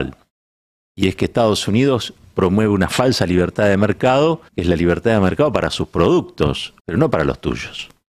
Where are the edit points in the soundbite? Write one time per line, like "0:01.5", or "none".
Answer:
0:04.5
0:06.8